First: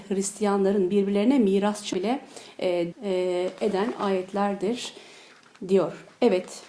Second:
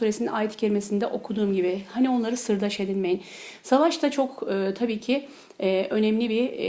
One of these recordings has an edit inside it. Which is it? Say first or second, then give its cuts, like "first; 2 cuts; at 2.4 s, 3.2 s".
first; 2 cuts; at 1.9 s, 2.9 s